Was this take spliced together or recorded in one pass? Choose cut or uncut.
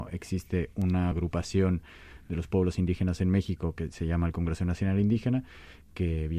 uncut